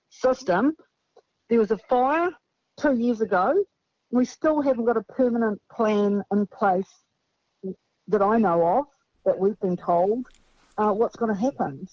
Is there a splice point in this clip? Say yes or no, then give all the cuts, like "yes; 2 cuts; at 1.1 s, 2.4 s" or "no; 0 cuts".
no; 0 cuts